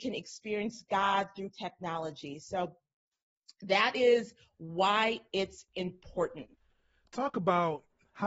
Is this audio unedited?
yes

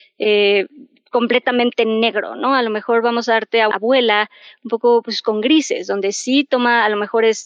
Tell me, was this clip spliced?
yes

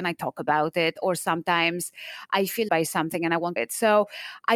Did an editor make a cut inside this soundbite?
yes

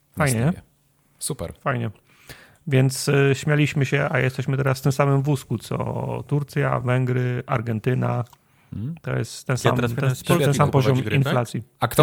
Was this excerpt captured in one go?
yes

